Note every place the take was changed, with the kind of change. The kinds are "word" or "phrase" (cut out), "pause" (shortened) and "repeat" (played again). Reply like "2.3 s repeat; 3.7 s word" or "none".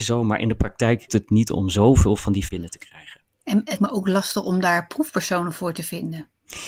1.1 s word; 2.5 s word; 3.8 s word